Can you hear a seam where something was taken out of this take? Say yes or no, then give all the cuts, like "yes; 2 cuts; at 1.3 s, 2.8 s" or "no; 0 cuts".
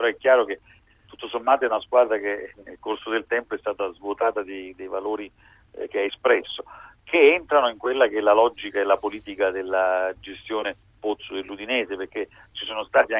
no; 0 cuts